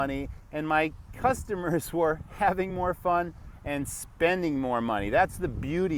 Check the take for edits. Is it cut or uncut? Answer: uncut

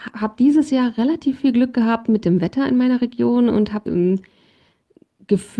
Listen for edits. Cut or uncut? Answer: cut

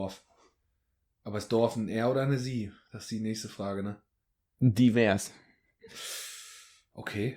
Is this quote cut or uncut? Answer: cut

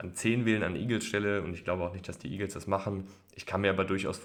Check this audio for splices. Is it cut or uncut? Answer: uncut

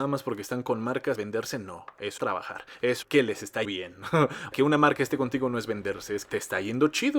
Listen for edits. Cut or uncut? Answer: cut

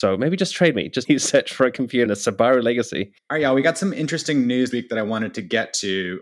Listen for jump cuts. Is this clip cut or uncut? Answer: cut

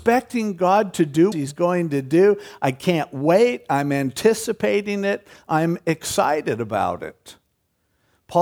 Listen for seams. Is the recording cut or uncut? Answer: cut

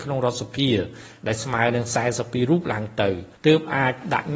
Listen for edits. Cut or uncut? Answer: cut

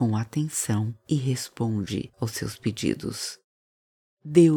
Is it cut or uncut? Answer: uncut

